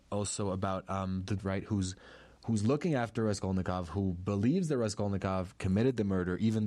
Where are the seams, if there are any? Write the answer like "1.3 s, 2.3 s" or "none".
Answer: 1.4 s